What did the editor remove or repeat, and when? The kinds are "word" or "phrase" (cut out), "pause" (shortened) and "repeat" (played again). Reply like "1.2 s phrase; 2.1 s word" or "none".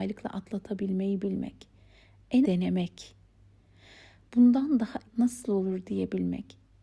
2.4 s word; 5.1 s word